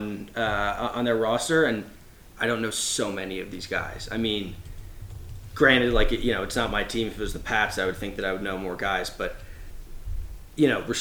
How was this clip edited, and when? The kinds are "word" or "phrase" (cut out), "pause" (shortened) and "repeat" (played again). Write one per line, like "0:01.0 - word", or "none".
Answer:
none